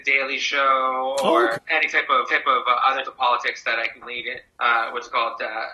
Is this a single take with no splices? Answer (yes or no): no